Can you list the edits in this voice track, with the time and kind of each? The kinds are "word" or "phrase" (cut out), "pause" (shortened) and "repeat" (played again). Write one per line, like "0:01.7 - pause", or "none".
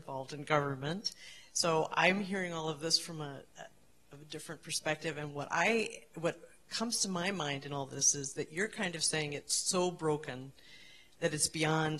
none